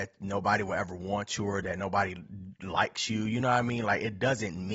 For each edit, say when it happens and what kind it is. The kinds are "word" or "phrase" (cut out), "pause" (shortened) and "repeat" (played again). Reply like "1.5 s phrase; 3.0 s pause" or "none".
none